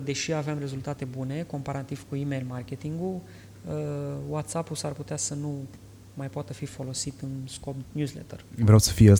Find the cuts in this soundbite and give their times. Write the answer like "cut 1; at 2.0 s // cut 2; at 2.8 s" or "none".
cut 1; at 1.0 s // cut 2; at 7.8 s